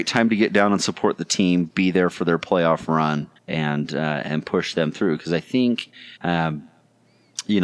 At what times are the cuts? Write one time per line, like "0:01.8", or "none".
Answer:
0:03.4
0:06.2